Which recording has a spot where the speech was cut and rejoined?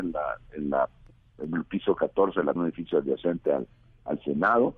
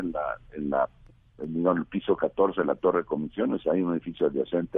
first; 2 cuts; at 1.5 s, 2.6 s

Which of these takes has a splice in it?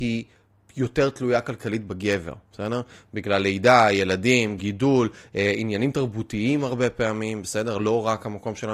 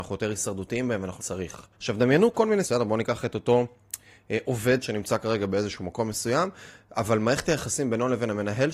second; 4 cuts; at 1.2 s, 1.7 s, 2.6 s, 4.8 s

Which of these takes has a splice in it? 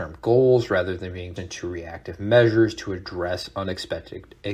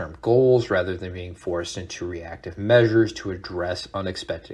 first; 1 cut; at 1.4 s

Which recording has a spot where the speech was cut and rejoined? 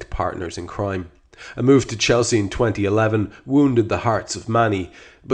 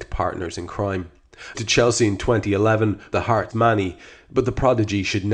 second; 3 cuts; at 1.5 s, 3.1 s, 3.5 s

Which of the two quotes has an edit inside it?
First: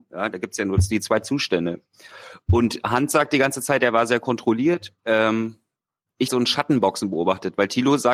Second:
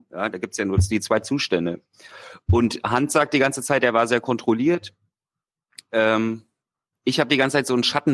first; 2 cuts; at 5.0 s, 6.3 s

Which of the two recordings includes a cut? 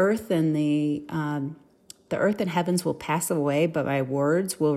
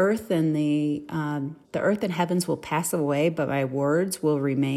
second; 1 cut; at 1.6 s

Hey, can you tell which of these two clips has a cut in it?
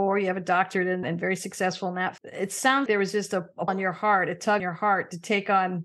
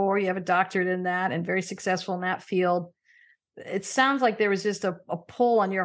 first; 5 cuts; at 1.0 s, 2.2 s, 2.9 s, 3.7 s, 4.6 s

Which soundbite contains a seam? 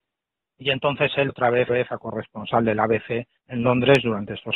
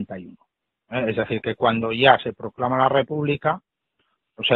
first; 3 cuts; at 1.3 s, 1.7 s, 3.4 s

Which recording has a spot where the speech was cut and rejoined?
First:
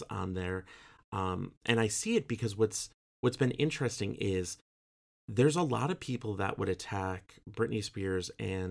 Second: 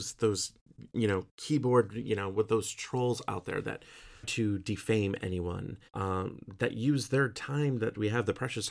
second; 2 cuts; at 4.2 s, 5.9 s

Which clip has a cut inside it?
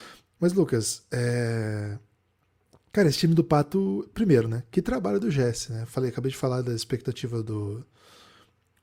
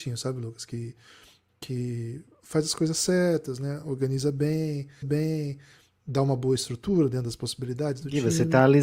second; 1 cut; at 5.0 s

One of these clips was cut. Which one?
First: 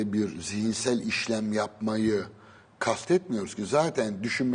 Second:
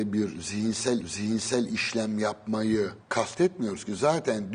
second; 2 cuts; at 1.0 s, 3.0 s

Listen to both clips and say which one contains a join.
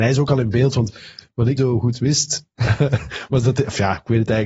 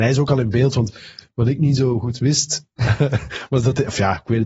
first; 1 cut; at 1.6 s

